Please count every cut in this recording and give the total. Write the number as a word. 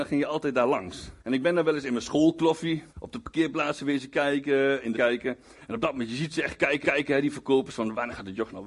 four